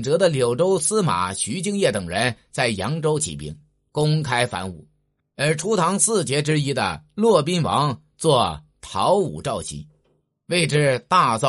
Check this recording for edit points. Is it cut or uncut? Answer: uncut